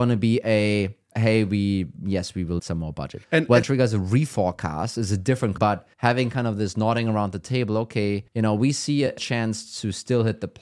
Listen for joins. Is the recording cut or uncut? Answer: cut